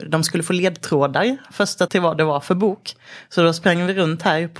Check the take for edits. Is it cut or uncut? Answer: cut